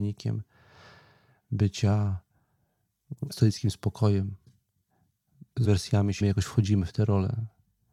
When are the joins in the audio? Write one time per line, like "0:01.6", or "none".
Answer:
0:03.3
0:05.6
0:06.2

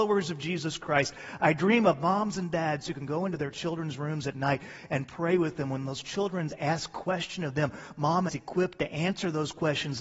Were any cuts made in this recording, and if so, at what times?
0:08.3

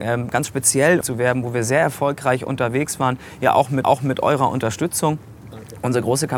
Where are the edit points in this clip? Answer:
0:01.0
0:03.8

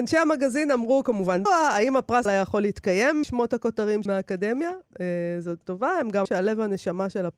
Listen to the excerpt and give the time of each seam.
0:01.5
0:02.3
0:03.2
0:04.1
0:05.6
0:06.3

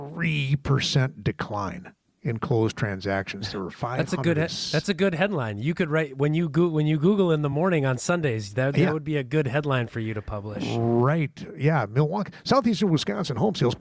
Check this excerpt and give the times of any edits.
none

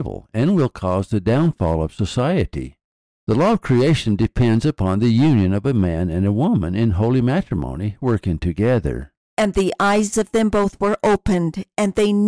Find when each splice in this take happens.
none

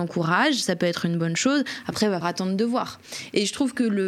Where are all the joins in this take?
0:02.2

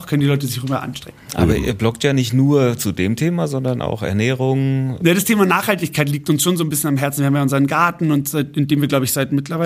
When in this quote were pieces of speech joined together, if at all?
none

